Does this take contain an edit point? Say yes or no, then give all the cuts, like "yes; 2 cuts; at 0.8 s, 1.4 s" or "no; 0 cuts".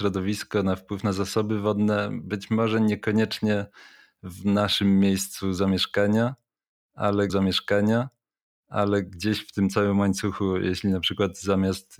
yes; 1 cut; at 7.3 s